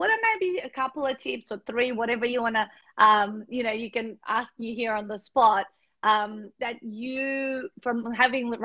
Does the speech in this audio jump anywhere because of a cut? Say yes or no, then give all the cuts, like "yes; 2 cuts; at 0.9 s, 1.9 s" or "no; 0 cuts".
no; 0 cuts